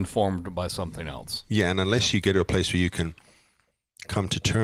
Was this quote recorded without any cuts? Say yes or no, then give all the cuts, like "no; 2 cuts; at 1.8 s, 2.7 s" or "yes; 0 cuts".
yes; 0 cuts